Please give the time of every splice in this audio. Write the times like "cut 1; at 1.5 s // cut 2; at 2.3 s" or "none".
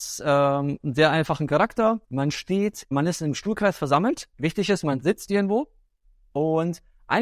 cut 1; at 2.0 s // cut 2; at 2.9 s // cut 3; at 4.3 s